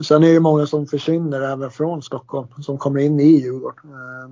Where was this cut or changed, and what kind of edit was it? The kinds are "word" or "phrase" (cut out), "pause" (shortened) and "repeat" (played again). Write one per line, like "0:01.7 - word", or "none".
none